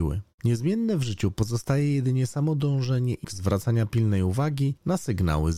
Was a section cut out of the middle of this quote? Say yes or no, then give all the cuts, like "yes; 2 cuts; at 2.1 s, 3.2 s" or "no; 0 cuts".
yes; 1 cut; at 3.2 s